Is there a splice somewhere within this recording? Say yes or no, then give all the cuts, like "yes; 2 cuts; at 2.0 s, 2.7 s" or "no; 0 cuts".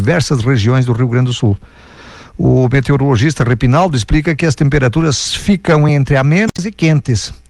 no; 0 cuts